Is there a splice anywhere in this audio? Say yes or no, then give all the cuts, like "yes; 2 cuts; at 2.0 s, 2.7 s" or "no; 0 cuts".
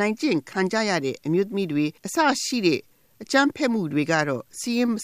yes; 1 cut; at 2.0 s